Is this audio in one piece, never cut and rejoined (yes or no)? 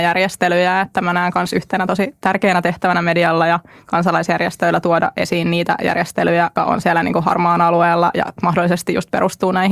no